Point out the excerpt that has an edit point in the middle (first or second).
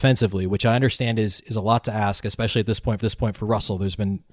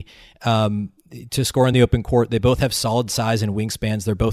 first